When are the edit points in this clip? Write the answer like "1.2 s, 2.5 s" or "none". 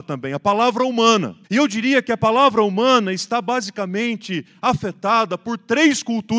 1.4 s